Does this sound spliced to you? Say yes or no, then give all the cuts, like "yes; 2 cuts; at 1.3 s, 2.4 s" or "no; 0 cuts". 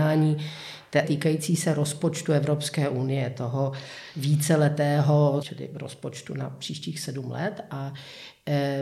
yes; 2 cuts; at 1.0 s, 5.4 s